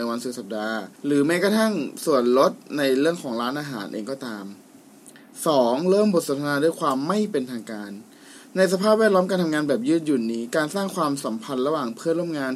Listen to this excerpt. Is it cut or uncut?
cut